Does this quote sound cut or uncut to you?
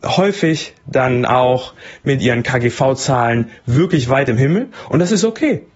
uncut